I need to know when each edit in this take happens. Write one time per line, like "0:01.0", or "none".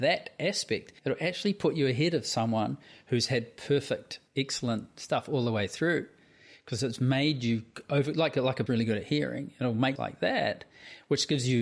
0:01.0
0:04.3
0:08.7
0:10.0